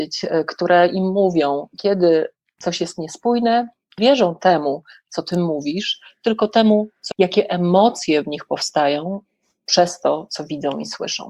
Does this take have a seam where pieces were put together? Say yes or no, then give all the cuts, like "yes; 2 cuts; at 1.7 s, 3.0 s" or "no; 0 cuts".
yes; 2 cuts; at 4.0 s, 7.1 s